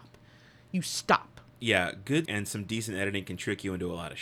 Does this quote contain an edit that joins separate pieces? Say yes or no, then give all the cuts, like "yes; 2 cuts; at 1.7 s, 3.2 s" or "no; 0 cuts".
yes; 2 cuts; at 1.5 s, 2.3 s